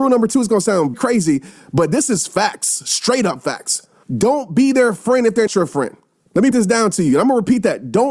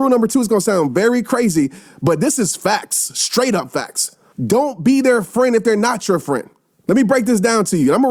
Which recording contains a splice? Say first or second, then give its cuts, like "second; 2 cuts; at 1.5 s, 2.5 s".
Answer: first; 3 cuts; at 0.9 s, 5.5 s, 6.5 s